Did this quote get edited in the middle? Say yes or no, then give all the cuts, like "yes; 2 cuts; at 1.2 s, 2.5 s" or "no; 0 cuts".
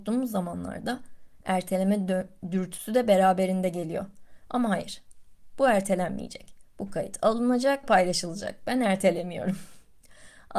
yes; 1 cut; at 7.8 s